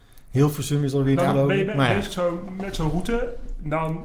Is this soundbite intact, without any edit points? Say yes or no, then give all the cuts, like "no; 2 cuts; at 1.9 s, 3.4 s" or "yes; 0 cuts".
no; 2 cuts; at 1.2 s, 2.1 s